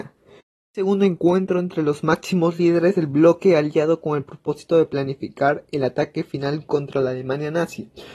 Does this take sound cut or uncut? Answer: uncut